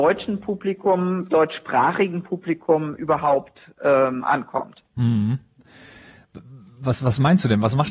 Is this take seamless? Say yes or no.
yes